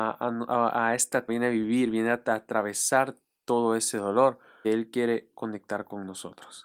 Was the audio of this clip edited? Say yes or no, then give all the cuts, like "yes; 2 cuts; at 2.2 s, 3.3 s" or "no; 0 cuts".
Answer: yes; 2 cuts; at 1.3 s, 4.6 s